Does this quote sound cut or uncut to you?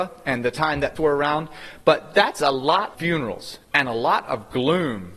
cut